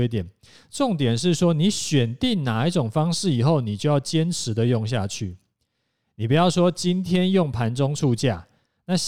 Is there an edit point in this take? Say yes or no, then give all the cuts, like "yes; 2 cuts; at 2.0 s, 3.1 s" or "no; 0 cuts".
no; 0 cuts